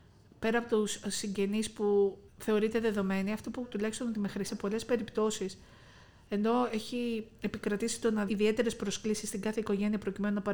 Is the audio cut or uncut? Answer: cut